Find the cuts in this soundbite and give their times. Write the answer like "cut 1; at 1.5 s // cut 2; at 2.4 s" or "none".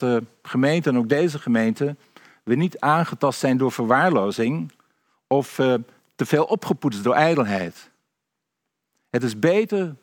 none